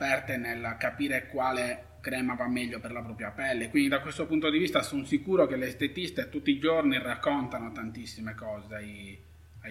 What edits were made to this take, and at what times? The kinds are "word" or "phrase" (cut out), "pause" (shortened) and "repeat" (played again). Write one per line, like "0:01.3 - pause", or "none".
none